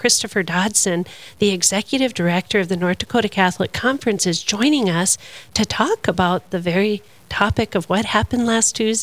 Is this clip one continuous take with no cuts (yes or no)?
yes